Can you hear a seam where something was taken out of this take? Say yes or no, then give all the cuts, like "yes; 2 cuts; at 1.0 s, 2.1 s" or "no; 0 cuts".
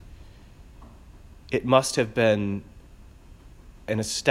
no; 0 cuts